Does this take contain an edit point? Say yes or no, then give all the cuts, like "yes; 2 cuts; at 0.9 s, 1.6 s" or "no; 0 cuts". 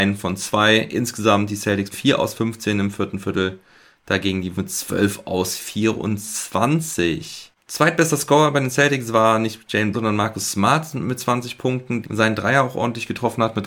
yes; 4 cuts; at 1.9 s, 4.5 s, 9.9 s, 12.0 s